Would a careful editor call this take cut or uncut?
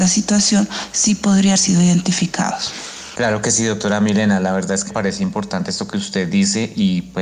cut